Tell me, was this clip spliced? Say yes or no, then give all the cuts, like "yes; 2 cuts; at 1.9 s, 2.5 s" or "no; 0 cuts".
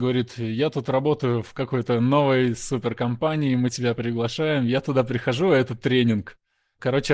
no; 0 cuts